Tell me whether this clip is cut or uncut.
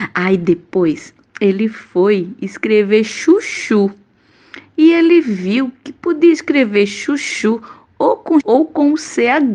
cut